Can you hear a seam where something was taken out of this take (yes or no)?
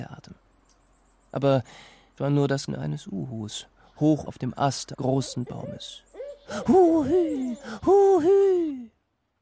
yes